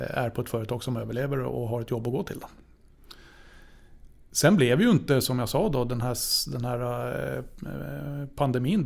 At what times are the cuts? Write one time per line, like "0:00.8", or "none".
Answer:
none